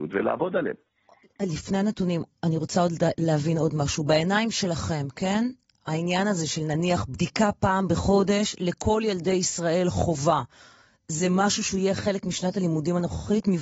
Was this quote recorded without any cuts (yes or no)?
yes